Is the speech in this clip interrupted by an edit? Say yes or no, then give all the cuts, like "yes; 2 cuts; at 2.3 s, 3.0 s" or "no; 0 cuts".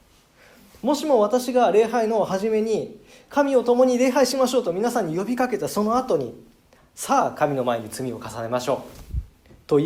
no; 0 cuts